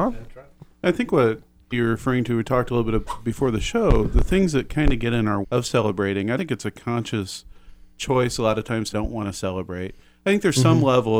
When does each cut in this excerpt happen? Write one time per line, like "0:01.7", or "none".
0:01.7
0:05.4
0:06.4
0:08.9